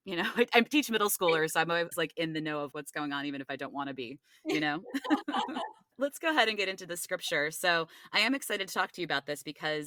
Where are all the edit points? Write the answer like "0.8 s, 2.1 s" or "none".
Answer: 1.9 s, 2.7 s